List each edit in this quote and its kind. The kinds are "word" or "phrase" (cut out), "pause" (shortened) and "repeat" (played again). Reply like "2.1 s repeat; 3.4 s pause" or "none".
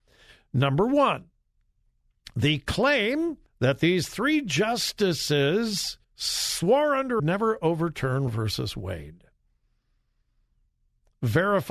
3.5 s pause; 6.0 s pause; 7.2 s phrase; 8.3 s word